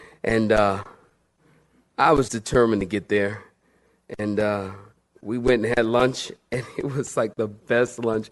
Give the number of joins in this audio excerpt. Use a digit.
1